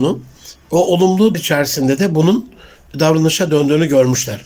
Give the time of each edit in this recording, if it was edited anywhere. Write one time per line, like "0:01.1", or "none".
0:01.3